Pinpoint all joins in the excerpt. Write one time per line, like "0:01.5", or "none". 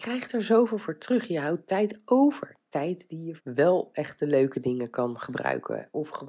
0:03.4